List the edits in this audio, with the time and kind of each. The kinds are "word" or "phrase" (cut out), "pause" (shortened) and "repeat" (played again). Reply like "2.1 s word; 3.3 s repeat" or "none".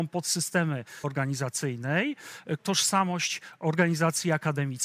1.0 s phrase; 2.6 s phrase